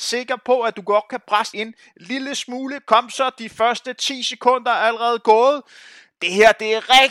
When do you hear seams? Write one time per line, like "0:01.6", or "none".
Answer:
0:01.5